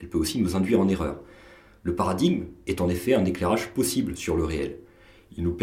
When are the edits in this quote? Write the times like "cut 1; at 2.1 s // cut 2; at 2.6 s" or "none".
none